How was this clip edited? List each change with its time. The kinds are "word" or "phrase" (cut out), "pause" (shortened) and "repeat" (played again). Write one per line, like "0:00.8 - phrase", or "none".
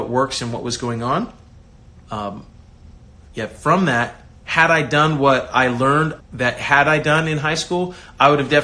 0:02.0 - pause
0:04.4 - pause
0:06.2 - word